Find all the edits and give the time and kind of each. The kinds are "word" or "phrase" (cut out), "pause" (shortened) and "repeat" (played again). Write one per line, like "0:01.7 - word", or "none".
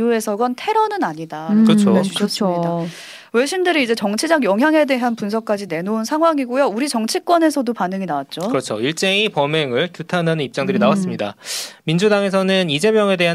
none